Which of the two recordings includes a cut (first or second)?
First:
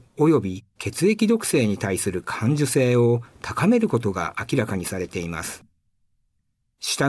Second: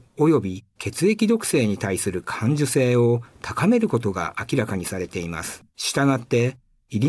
second